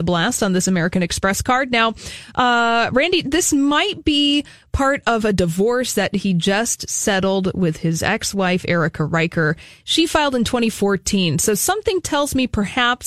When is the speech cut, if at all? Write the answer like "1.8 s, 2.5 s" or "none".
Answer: none